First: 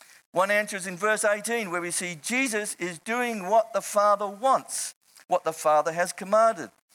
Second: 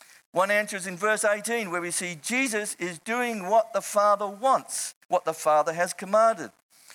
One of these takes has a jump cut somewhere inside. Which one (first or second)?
second